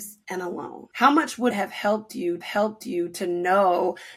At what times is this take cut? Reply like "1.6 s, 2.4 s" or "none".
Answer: 1.5 s, 2.4 s